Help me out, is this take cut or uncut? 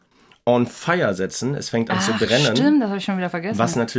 uncut